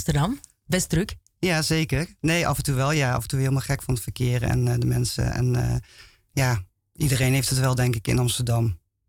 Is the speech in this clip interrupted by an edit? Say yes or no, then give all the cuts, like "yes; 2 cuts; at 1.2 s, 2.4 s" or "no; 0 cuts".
no; 0 cuts